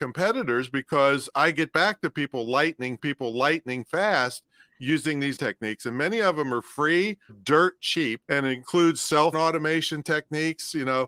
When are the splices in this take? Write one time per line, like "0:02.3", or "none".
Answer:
0:03.0
0:05.4
0:07.3
0:08.2
0:09.3